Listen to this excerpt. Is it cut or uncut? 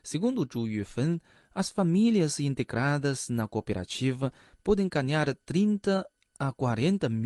uncut